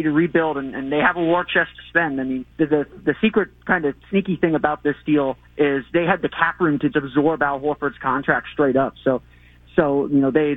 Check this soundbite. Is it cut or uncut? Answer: cut